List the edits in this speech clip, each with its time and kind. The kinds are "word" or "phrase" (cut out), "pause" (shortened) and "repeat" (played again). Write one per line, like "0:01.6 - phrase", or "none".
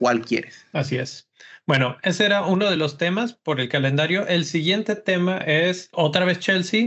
none